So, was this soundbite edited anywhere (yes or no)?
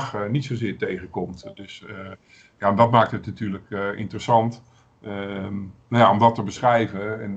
no